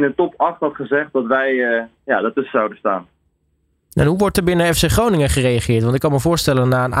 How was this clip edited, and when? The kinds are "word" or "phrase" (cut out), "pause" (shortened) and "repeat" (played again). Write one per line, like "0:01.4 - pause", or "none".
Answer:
none